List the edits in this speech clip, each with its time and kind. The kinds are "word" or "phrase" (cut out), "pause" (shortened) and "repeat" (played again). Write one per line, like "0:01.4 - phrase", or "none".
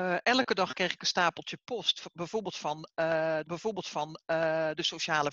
0:03.4 - repeat